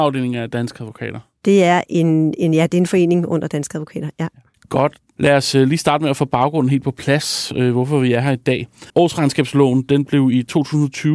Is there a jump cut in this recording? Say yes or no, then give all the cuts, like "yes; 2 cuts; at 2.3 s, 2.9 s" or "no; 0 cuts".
yes; 2 cuts; at 4.5 s, 8.9 s